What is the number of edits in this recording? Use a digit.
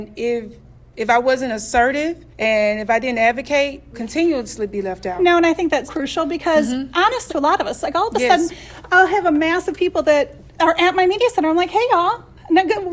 4